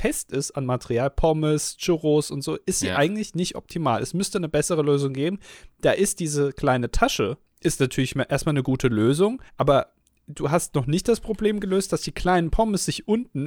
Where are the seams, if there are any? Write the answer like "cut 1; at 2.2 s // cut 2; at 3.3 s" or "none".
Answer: cut 1; at 7.5 s // cut 2; at 9.5 s